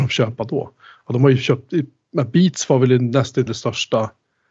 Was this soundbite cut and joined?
yes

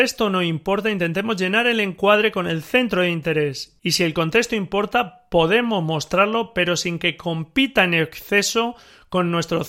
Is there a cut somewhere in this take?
no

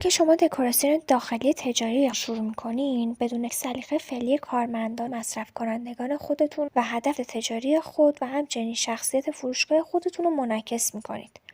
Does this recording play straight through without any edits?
no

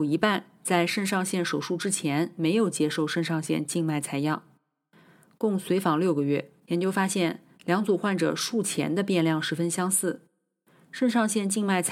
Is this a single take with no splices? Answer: no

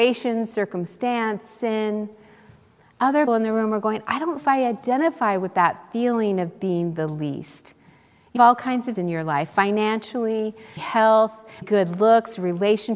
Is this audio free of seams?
no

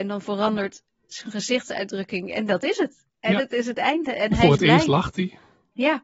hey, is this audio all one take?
no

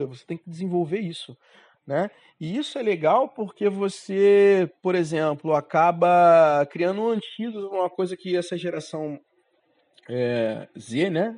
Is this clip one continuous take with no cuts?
yes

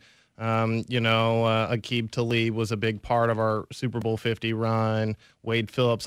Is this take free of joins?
yes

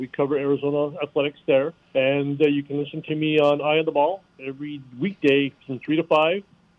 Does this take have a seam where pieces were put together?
yes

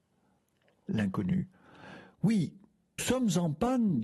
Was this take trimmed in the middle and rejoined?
yes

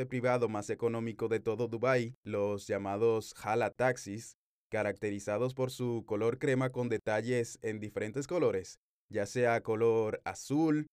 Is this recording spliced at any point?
yes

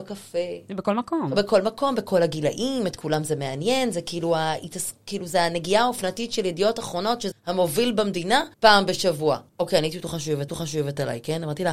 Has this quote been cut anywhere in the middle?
yes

